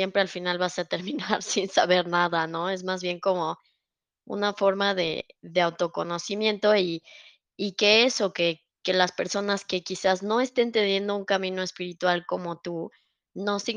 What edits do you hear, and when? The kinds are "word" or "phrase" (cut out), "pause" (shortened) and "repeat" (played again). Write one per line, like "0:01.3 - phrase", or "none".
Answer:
none